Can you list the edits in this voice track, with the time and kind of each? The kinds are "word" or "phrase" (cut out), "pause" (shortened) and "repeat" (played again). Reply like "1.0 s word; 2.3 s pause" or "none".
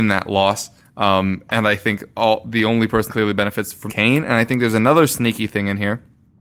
3.1 s word; 3.9 s phrase